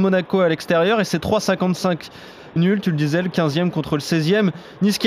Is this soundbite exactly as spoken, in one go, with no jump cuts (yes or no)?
no